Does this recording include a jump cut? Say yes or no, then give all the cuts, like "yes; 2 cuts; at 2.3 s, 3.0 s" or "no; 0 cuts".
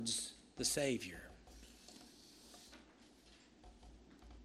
no; 0 cuts